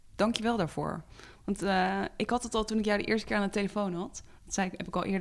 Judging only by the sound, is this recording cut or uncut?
uncut